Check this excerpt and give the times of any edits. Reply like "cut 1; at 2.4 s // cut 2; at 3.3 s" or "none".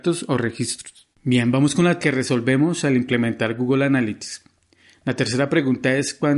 cut 1; at 1.1 s // cut 2; at 2.0 s